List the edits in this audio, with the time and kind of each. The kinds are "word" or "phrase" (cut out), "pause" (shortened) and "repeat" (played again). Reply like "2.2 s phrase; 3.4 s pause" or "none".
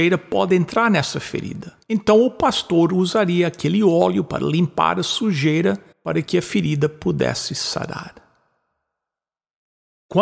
1.8 s pause; 5.9 s pause

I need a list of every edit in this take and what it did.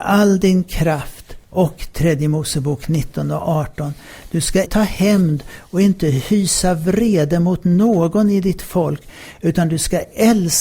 1.4 s pause; 4.6 s word

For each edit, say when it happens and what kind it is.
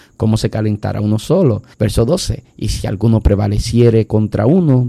1.7 s pause

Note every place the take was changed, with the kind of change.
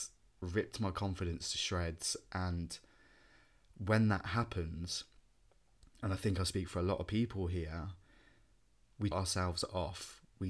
9.1 s phrase

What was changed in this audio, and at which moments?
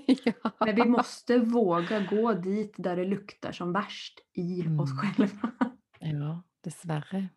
none

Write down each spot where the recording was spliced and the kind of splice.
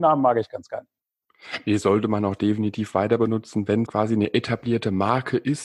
3.9 s word

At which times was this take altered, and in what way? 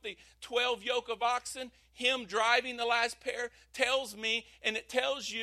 none

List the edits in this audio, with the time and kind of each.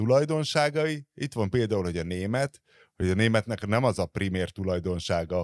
none

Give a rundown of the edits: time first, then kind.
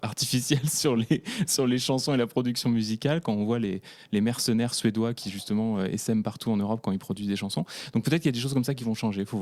none

